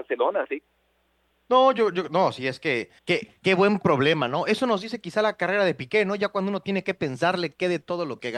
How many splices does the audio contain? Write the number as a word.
one